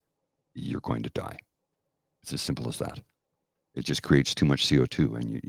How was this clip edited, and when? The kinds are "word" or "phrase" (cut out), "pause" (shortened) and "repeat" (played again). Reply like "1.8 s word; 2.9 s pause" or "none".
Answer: none